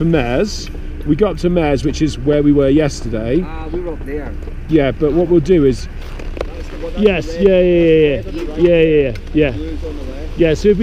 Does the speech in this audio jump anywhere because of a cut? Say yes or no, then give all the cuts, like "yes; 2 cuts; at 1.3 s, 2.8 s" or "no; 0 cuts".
no; 0 cuts